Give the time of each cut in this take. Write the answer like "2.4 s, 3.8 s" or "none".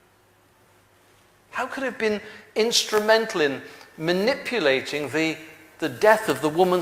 none